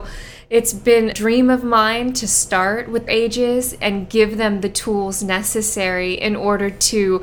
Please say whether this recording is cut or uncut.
cut